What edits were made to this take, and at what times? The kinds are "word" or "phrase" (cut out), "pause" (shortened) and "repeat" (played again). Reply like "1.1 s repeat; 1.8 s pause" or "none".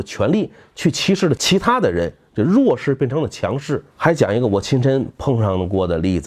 3.9 s pause